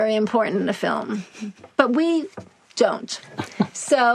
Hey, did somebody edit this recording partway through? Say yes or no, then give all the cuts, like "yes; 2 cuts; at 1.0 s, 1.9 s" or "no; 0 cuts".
yes; 1 cut; at 1.7 s